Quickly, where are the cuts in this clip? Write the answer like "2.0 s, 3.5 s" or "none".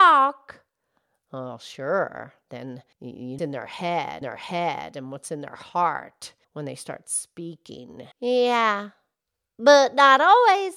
2.9 s, 3.4 s, 4.2 s, 6.4 s, 8.1 s